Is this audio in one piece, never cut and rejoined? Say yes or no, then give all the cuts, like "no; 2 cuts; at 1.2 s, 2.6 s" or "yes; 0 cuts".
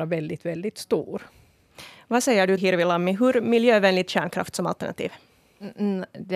no; 2 cuts; at 2.6 s, 4.1 s